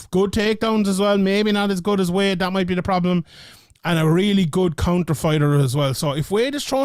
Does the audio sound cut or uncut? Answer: uncut